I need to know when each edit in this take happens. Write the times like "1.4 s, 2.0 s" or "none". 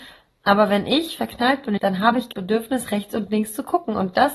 1.8 s, 2.3 s